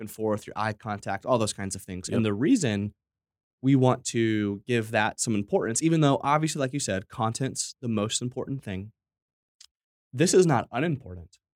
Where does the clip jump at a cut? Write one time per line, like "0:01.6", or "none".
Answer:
none